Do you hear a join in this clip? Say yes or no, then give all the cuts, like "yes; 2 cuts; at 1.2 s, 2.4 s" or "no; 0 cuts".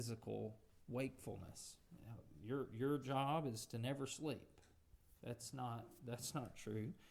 no; 0 cuts